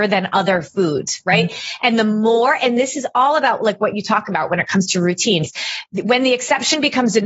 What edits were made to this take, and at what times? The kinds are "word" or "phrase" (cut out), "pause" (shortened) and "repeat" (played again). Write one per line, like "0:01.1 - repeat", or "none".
none